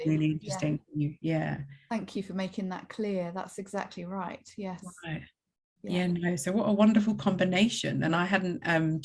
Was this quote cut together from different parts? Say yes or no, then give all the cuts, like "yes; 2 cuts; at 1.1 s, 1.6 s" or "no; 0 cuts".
no; 0 cuts